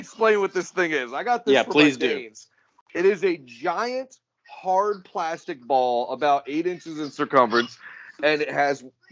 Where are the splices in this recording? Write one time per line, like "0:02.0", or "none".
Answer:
none